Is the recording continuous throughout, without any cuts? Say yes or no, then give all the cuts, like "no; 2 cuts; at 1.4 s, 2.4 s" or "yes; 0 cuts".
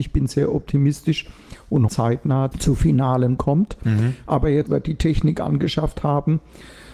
no; 4 cuts; at 1.9 s, 2.5 s, 3.4 s, 4.7 s